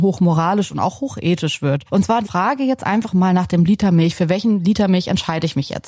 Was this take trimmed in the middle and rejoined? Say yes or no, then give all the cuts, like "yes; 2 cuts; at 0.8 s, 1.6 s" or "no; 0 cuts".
yes; 2 cuts; at 1.9 s, 2.2 s